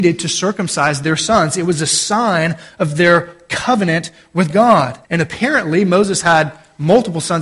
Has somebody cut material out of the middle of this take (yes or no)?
yes